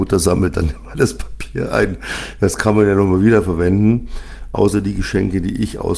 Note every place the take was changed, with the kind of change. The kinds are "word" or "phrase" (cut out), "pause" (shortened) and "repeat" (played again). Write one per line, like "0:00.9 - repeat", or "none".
none